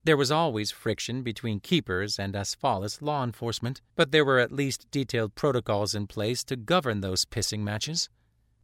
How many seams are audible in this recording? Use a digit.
1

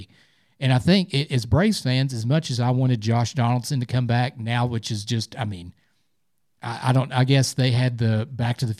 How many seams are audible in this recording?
0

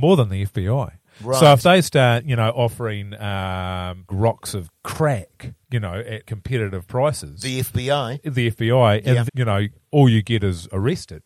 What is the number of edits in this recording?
4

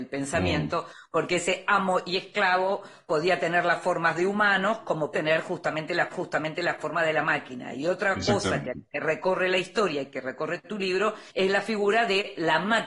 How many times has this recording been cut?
3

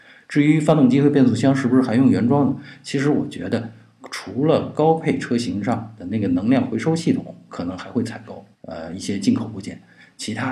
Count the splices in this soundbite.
1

